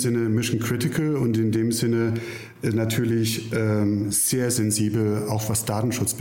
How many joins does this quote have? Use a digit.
0